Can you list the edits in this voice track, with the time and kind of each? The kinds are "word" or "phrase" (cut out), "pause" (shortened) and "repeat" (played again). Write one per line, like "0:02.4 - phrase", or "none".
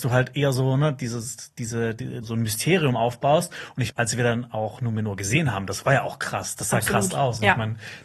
0:02.2 - word
0:03.9 - word